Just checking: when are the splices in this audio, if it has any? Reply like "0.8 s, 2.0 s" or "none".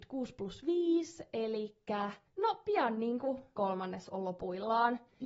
2.3 s, 3.6 s

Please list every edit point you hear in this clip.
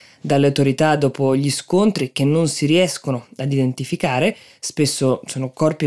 none

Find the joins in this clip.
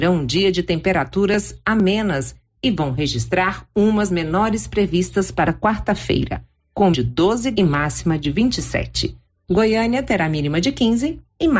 4.1 s, 5.5 s, 6.9 s, 7.5 s

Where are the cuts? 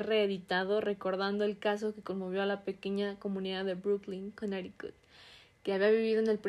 none

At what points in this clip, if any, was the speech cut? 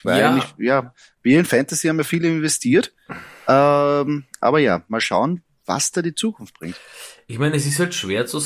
none

